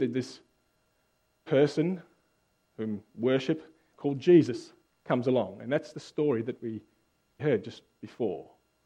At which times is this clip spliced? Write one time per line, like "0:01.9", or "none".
0:01.5
0:03.1
0:03.9
0:04.8
0:05.9
0:07.4